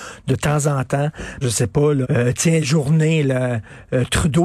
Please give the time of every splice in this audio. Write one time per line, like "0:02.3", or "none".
0:01.4
0:02.0
0:02.6